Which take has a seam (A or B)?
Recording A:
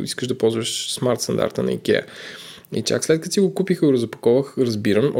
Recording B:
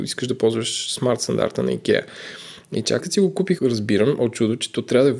B